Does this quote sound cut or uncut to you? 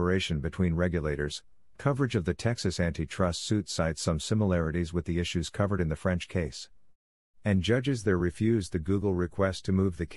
uncut